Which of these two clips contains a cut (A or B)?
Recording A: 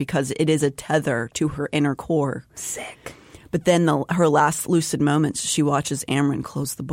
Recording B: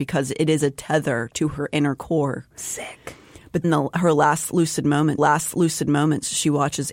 B